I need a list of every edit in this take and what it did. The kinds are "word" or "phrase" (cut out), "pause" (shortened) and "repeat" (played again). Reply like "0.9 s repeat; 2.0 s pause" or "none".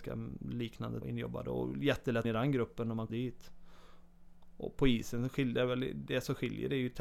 1.0 s phrase; 2.2 s phrase; 3.1 s word